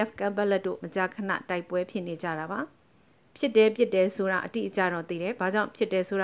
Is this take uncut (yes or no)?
yes